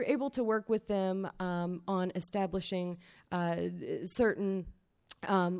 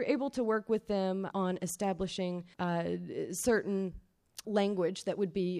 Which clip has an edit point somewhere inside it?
second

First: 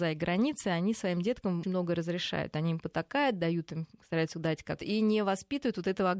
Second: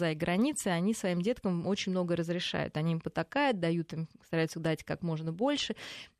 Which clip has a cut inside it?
first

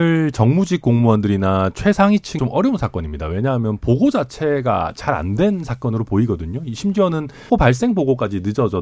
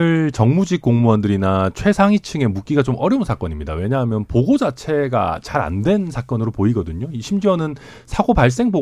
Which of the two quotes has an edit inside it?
first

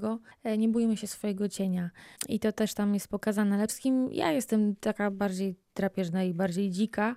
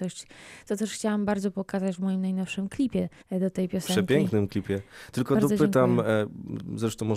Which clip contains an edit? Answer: first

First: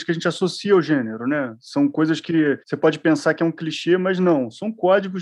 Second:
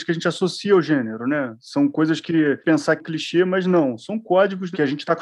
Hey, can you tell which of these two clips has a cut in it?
second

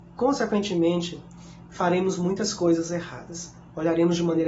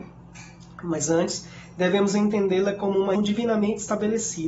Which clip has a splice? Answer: second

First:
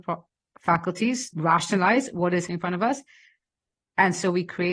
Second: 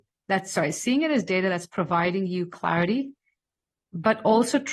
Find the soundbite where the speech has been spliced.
first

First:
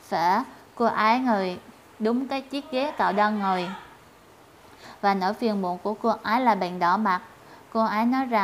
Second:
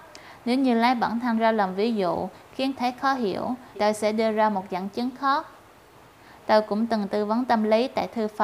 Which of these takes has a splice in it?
second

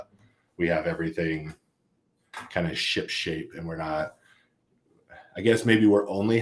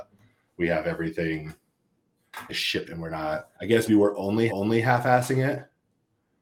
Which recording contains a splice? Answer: second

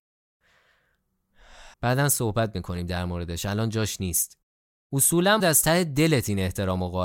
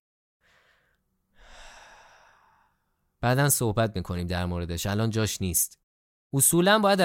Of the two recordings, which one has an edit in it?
first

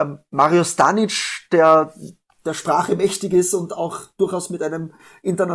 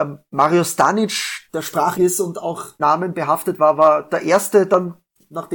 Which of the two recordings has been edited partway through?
second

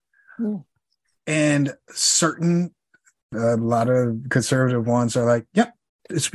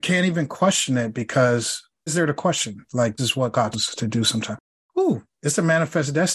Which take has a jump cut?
second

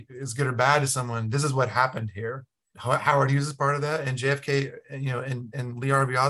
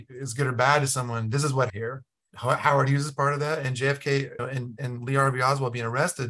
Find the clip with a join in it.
second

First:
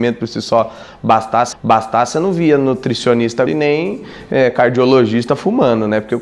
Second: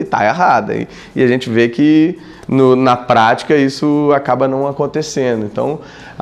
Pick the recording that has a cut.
first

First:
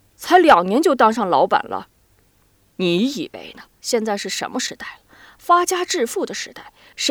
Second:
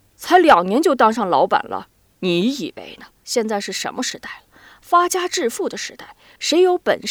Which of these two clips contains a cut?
second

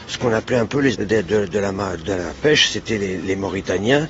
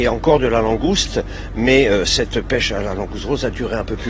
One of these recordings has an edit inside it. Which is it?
first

